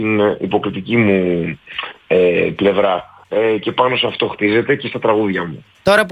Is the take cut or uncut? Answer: cut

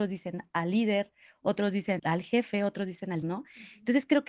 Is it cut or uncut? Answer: cut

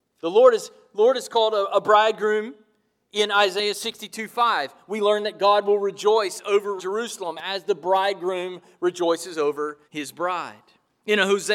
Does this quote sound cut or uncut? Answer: cut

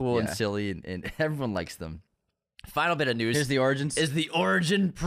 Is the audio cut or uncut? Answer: uncut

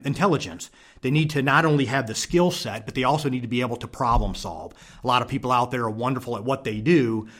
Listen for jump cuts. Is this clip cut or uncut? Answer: uncut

